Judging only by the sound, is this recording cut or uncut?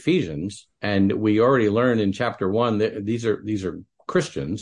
uncut